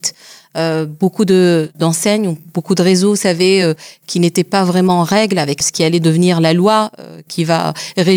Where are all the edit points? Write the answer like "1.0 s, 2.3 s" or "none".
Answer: none